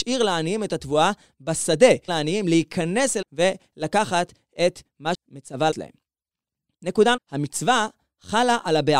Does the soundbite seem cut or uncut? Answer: cut